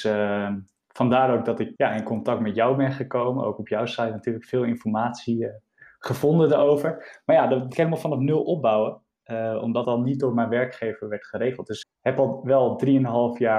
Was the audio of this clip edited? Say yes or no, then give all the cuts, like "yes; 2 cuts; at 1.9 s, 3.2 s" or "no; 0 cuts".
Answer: yes; 4 cuts; at 1.8 s, 7.7 s, 9.8 s, 11.8 s